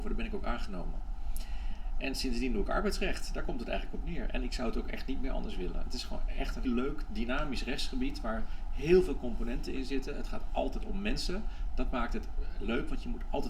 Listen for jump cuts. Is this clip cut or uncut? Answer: cut